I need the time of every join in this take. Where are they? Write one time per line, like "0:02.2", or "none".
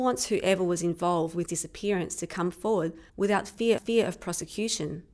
0:01.5
0:03.1
0:03.8